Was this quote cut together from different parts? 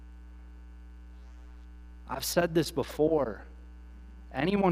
no; 0 cuts

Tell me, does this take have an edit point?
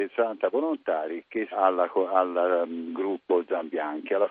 yes; 1 cut; at 1.5 s

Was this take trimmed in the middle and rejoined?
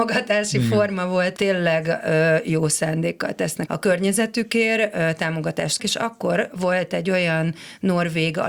yes; 3 cuts; at 1.4 s, 3.7 s, 5.8 s

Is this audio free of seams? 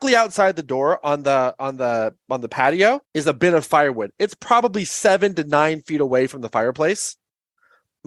no; 1 cut; at 3.0 s

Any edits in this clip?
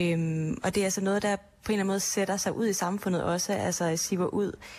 no; 0 cuts

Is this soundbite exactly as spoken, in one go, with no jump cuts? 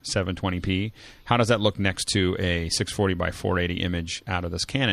yes; 0 cuts

